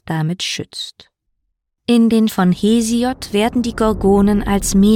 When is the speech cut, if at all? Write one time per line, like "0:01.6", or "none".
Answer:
0:01.7
0:02.3